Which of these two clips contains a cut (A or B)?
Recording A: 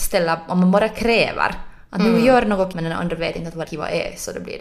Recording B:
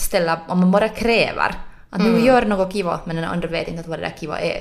A